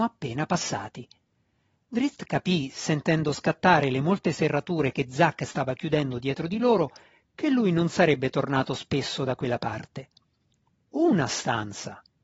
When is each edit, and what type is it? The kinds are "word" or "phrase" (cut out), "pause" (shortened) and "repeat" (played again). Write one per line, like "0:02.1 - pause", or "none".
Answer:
none